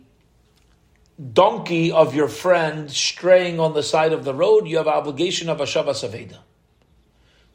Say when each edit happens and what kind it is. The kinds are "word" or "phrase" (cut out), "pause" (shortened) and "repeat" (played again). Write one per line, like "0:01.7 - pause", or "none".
none